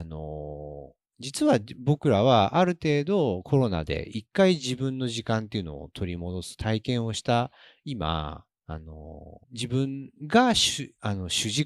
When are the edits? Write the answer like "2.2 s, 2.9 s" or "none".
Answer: 8.5 s, 9.4 s, 10.2 s